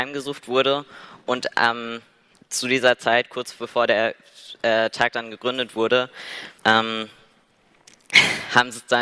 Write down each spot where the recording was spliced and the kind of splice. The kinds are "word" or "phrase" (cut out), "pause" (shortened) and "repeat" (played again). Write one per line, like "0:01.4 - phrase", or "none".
0:02.3 - pause
0:06.6 - pause

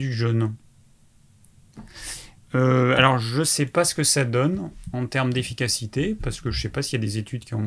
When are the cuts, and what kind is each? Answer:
none

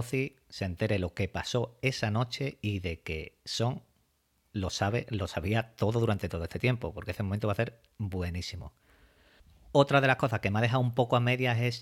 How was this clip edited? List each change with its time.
none

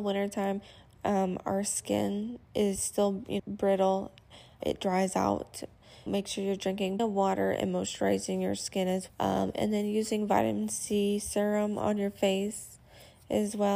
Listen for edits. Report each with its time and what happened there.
0:02.4 - pause
0:03.4 - word
0:04.6 - word
0:06.1 - word
0:07.0 - word
0:09.1 - word

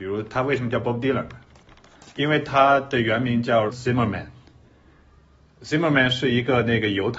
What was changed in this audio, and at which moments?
0:03.7 - word

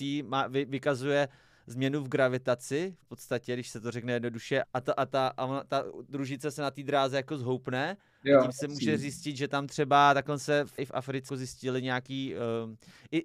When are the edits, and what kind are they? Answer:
0:04.6 - word
0:10.8 - word
0:11.3 - word

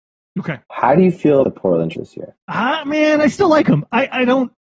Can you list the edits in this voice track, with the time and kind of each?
0:01.4 - word
0:01.9 - word
0:02.4 - pause

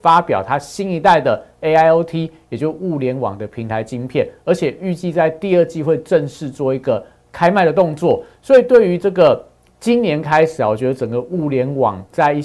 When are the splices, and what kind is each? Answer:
none

